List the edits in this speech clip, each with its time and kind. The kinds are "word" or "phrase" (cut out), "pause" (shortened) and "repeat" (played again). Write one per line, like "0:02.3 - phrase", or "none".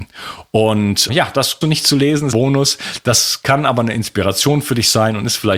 0:01.1 - word
0:01.6 - phrase
0:02.3 - phrase